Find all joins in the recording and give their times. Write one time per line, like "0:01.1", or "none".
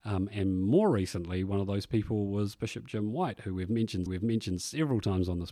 0:04.1